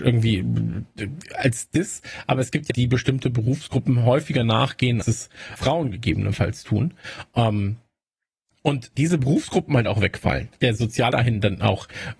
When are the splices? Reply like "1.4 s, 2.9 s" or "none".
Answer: 2.7 s, 5.0 s, 5.6 s, 9.0 s, 10.5 s, 11.1 s